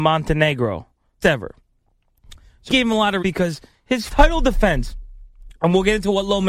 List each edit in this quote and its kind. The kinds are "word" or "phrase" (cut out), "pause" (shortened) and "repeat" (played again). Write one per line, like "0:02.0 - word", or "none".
0:01.2 - word
0:02.7 - word
0:03.2 - word
0:04.1 - word